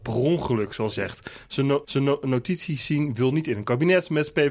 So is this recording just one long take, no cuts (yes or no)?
no